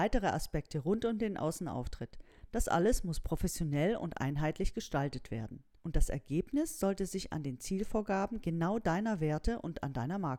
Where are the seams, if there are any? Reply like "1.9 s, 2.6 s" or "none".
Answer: none